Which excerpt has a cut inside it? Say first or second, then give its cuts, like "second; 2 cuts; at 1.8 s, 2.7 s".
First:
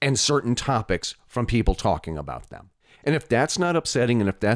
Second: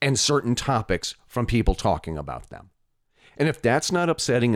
first; 1 cut; at 2.8 s